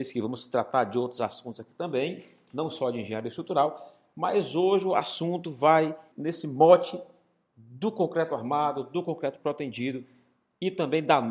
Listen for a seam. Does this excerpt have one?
yes; 1 cut; at 6.1 s

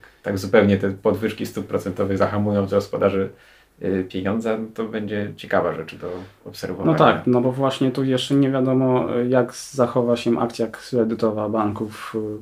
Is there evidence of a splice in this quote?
no; 0 cuts

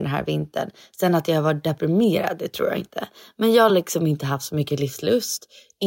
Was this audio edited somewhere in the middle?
no; 0 cuts

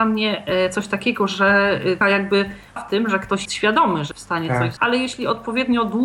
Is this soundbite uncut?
no; 5 cuts; at 2.0 s, 2.8 s, 3.5 s, 4.1 s, 4.8 s

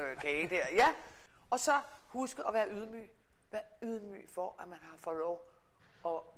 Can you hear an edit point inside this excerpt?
no; 0 cuts

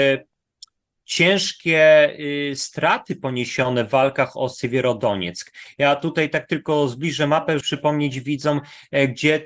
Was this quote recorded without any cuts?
no; 1 cut; at 7.6 s

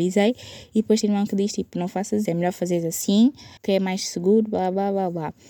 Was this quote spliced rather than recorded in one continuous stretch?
yes; 3 cuts; at 1.0 s, 2.2 s, 3.6 s

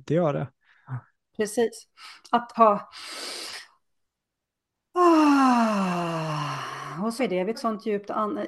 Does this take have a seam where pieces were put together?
yes; 3 cuts; at 2.5 s, 7.2 s, 7.5 s

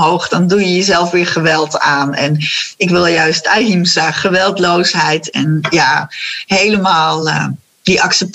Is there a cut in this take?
no; 0 cuts

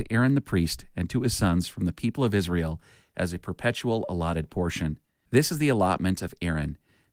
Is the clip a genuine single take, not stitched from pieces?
yes; 0 cuts

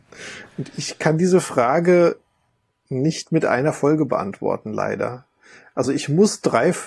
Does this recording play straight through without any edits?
yes; 0 cuts

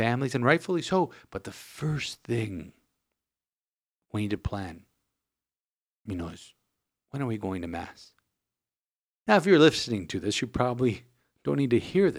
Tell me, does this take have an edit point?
no; 0 cuts

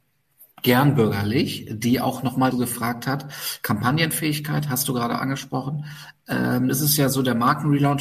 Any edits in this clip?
yes; 2 cuts; at 2.5 s, 6.7 s

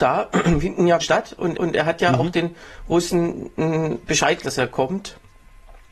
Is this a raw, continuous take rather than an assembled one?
no; 3 cuts; at 1.0 s, 1.5 s, 4.4 s

